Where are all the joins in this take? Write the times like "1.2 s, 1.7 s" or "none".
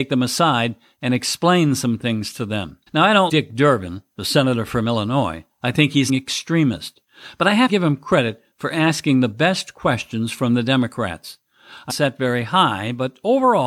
2.9 s, 3.3 s, 6.1 s, 7.7 s, 11.9 s